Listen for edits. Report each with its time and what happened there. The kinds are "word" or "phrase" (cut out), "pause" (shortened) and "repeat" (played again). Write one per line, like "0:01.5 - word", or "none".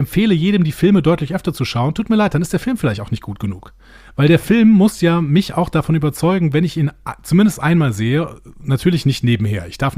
none